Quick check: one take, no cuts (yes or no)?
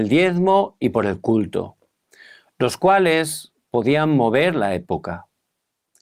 yes